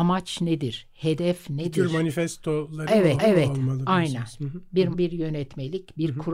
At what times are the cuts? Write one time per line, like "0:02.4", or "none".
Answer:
0:03.2
0:04.9

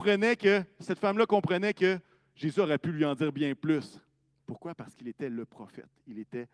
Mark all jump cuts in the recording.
none

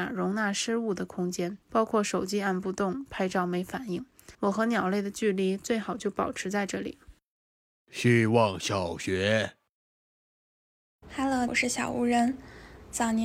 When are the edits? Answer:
0:01.6
0:04.3
0:07.6
0:11.5

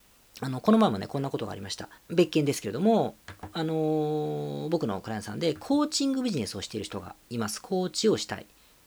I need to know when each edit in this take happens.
0:02.0

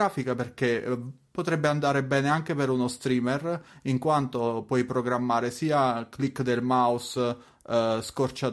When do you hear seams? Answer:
none

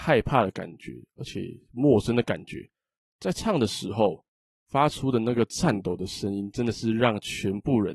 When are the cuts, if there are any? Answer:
none

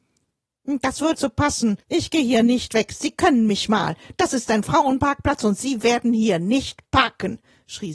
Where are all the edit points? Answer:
0:01.1
0:01.8

